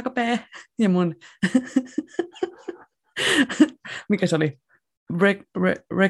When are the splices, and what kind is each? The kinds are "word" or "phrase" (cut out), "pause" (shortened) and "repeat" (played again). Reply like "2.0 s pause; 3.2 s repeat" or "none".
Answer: none